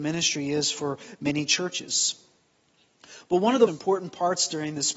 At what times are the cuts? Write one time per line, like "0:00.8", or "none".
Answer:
0:03.7